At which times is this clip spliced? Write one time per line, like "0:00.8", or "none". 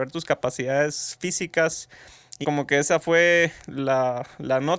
0:02.4
0:03.6